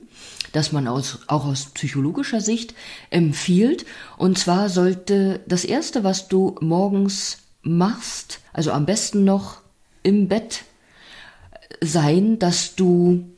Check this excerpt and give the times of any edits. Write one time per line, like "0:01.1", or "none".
0:08.5